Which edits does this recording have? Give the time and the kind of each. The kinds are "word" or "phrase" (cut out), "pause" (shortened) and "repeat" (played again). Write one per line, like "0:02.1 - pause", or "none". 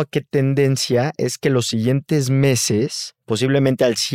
0:03.2 - pause